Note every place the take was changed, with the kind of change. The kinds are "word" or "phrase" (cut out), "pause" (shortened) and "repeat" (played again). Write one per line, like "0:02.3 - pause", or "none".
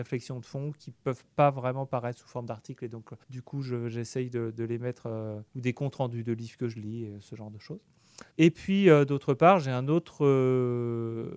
0:03.2 - pause
0:05.5 - pause
0:08.3 - pause